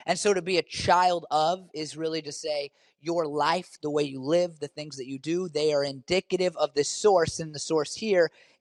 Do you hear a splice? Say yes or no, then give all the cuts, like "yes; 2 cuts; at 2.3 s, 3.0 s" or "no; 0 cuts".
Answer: no; 0 cuts